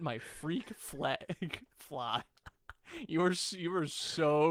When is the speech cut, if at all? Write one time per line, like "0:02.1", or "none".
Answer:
none